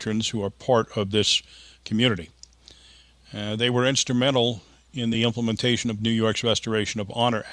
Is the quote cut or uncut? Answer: uncut